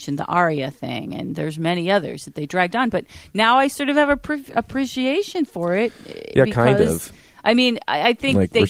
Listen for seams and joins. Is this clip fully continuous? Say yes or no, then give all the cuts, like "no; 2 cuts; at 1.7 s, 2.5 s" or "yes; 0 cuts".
yes; 0 cuts